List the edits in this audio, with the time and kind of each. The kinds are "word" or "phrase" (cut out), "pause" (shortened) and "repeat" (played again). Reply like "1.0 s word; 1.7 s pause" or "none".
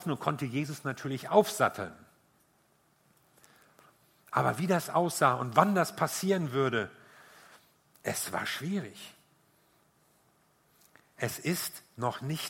none